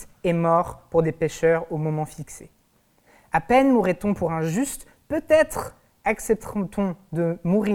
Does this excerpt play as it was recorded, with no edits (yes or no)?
yes